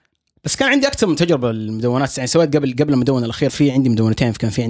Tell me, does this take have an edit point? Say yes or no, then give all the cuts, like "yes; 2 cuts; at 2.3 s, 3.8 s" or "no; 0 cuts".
yes; 1 cut; at 3.5 s